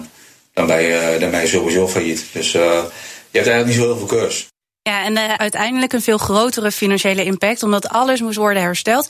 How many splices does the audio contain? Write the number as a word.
two